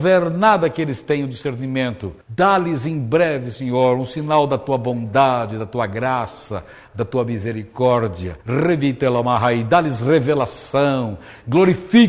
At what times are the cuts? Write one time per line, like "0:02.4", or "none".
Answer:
0:02.2
0:08.4